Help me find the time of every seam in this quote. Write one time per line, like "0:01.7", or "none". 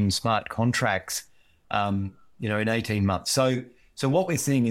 none

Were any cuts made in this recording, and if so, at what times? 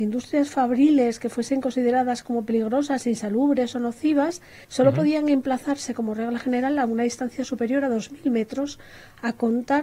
0:04.6

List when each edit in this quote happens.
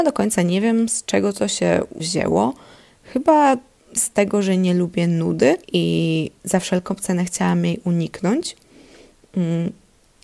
0:02.0
0:04.0
0:05.6

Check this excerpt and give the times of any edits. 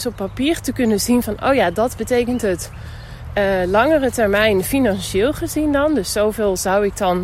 none

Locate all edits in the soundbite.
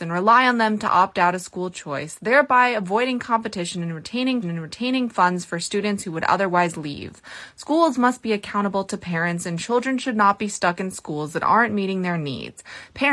0:04.4

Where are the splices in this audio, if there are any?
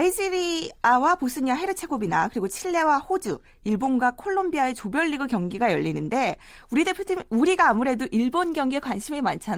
none

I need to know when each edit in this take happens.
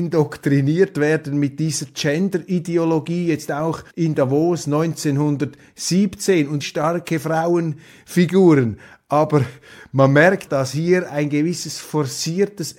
0:03.9
0:06.6
0:10.5

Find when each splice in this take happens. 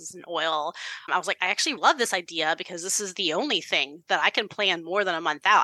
0:01.1
0:01.8

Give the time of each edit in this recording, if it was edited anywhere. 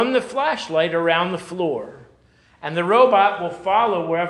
none

